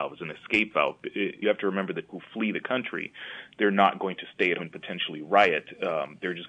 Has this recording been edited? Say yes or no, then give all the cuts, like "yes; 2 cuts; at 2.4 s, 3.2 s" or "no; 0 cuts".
yes; 3 cuts; at 1.4 s, 2.1 s, 4.6 s